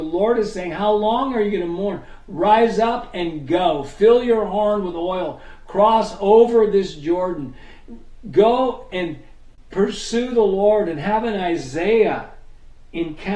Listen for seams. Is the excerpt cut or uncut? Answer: uncut